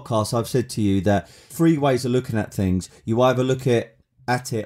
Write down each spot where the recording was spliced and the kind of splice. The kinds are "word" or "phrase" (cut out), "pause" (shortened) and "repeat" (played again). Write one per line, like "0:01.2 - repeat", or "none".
0:01.5 - word